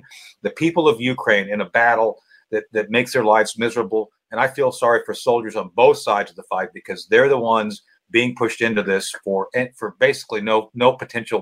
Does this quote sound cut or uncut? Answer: uncut